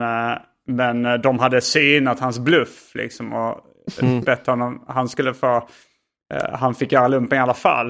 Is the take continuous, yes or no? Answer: yes